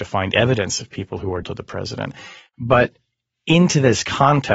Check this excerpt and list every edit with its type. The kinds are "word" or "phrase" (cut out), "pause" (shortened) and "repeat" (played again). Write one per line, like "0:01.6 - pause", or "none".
0:01.4 - word